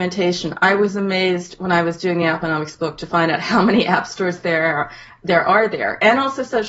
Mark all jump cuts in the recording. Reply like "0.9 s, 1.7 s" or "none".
none